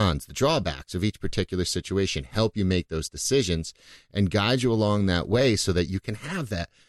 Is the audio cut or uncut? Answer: uncut